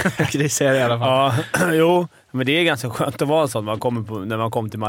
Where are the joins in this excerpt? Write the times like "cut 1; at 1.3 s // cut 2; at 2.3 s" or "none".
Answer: none